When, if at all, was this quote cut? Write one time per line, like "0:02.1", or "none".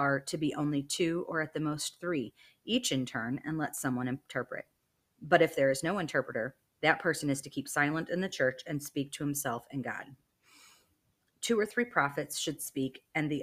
none